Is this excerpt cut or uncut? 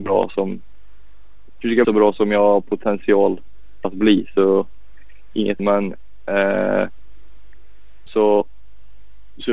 cut